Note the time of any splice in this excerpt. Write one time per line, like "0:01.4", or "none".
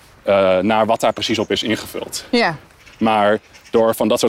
none